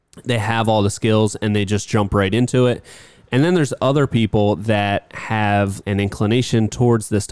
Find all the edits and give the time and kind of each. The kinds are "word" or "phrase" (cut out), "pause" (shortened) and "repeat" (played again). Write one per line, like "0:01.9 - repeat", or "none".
0:05.8 - word